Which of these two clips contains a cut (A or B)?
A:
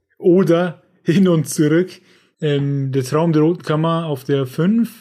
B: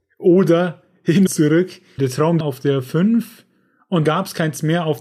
B